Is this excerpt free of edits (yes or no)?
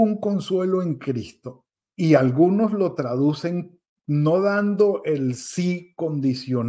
yes